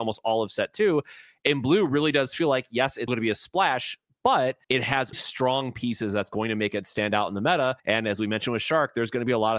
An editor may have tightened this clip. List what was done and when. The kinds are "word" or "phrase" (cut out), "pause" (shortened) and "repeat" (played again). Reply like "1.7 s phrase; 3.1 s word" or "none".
3.1 s word; 4.6 s pause; 5.1 s word; 7.8 s pause